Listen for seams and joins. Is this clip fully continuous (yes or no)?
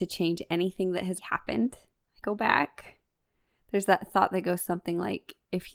no